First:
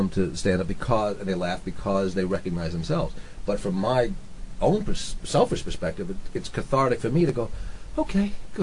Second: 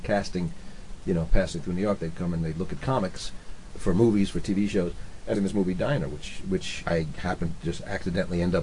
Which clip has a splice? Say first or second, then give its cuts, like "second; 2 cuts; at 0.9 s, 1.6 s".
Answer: second; 3 cuts; at 3.7 s, 5.3 s, 6.8 s